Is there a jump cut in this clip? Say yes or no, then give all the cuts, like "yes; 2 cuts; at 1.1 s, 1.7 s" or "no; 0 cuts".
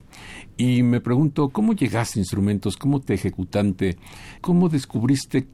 yes; 2 cuts; at 2.1 s, 3.1 s